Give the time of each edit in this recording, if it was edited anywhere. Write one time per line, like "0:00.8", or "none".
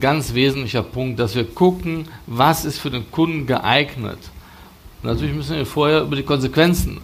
0:04.9